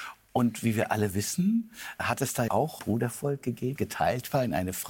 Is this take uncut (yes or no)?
no